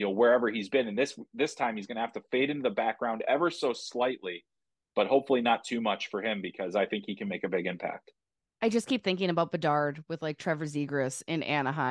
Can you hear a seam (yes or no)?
no